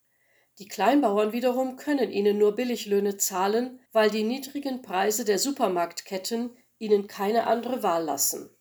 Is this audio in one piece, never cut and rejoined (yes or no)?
no